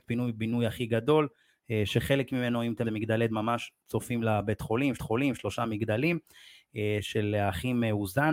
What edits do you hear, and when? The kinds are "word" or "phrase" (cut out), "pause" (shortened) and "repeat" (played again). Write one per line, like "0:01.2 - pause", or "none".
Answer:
0:02.8 - word
0:03.3 - word
0:05.0 - repeat

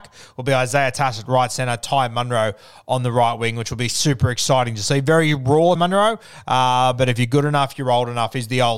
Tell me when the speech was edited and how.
0:05.8 - word

